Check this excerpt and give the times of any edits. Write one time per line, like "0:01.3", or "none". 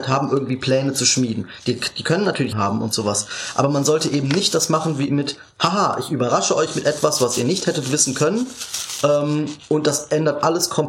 0:02.5